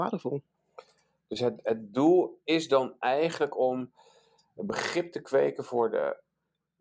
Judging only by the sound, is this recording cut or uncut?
uncut